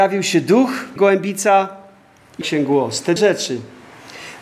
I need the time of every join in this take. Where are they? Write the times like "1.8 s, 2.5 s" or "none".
1.0 s, 2.4 s, 3.2 s